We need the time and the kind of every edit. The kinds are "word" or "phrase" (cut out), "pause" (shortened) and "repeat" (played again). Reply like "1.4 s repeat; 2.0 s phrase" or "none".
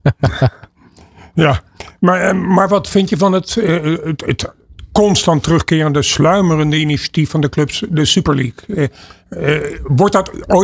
none